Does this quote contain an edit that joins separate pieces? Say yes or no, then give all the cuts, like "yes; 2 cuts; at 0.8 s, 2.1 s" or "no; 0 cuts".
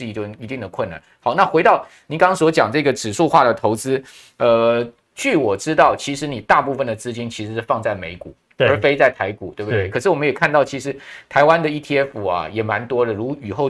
no; 0 cuts